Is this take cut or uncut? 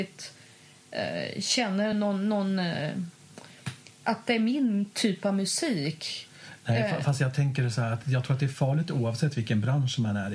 uncut